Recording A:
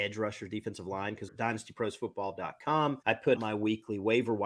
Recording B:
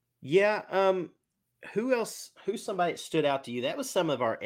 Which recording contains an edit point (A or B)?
A